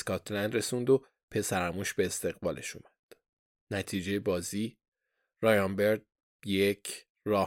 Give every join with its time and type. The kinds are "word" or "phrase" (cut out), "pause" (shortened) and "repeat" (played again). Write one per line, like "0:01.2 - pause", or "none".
none